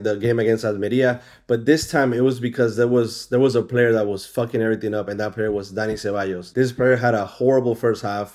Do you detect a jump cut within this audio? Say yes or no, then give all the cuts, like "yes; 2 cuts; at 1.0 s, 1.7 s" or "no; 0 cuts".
no; 0 cuts